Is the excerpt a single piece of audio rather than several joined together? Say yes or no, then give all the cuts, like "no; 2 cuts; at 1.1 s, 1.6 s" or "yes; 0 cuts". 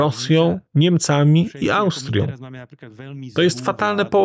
yes; 0 cuts